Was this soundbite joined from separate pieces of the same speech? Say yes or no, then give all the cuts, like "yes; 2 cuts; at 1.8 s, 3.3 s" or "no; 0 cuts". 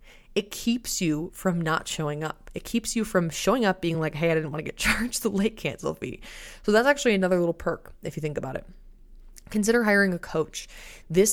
no; 0 cuts